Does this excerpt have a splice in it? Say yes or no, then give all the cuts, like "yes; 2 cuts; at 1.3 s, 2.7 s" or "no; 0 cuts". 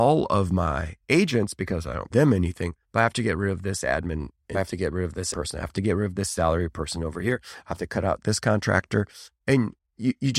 yes; 5 cuts; at 2.1 s, 2.8 s, 4.5 s, 5.3 s, 9.3 s